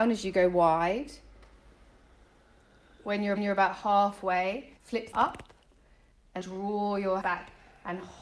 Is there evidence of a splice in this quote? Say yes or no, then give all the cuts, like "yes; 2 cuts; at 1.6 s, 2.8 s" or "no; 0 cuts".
yes; 5 cuts; at 3.4 s, 4.8 s, 5.1 s, 6.4 s, 7.2 s